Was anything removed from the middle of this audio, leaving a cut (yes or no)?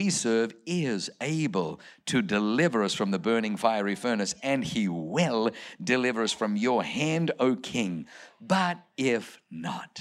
no